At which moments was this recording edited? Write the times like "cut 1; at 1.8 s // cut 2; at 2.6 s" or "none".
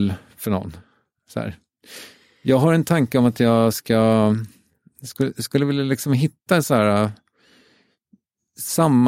none